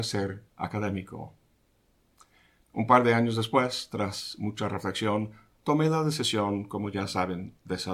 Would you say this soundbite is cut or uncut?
uncut